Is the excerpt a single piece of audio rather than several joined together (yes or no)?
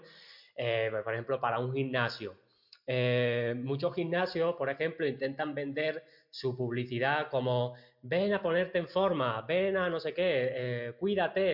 yes